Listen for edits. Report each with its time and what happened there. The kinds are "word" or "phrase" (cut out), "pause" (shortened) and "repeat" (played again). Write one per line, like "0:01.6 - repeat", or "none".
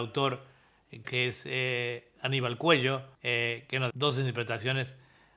0:01.0 - word
0:03.1 - pause
0:03.9 - word